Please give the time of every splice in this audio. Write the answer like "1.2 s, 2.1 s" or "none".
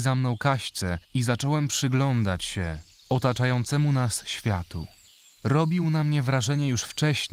none